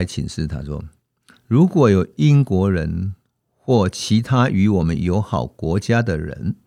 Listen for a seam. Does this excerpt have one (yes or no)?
no